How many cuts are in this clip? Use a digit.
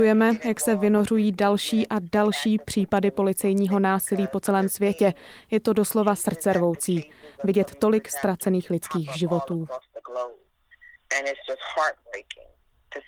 0